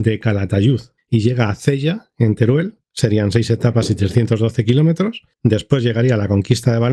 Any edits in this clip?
yes; 2 cuts; at 1.0 s, 2.8 s

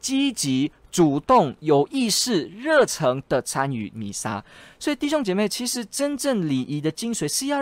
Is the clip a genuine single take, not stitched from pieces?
yes; 0 cuts

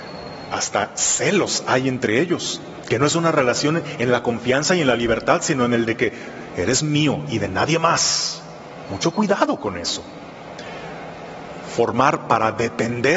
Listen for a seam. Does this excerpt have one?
no; 0 cuts

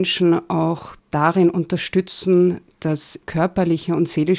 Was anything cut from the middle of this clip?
yes; 2 cuts; at 1.0 s, 3.2 s

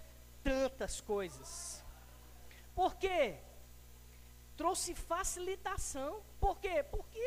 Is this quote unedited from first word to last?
yes; 0 cuts

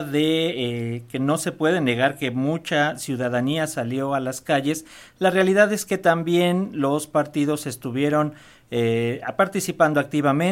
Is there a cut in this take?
no; 0 cuts

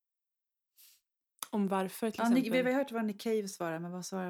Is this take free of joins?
yes; 0 cuts

